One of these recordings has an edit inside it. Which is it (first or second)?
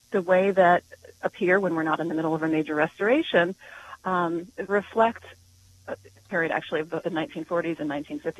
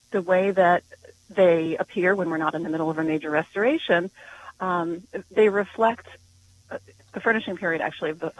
first